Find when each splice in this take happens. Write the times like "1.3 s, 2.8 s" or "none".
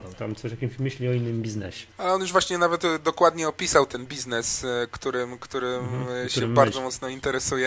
1.9 s